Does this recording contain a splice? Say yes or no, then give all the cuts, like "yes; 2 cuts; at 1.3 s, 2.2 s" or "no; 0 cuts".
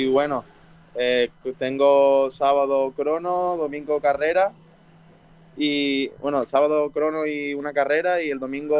no; 0 cuts